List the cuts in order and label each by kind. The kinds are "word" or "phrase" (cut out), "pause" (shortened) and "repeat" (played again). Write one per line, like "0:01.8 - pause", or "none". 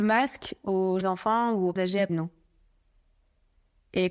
0:01.0 - word
0:01.8 - word
0:02.1 - word